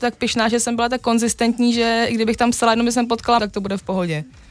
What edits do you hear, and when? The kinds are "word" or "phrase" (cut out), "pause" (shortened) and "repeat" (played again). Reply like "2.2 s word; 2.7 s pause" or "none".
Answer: 3.4 s word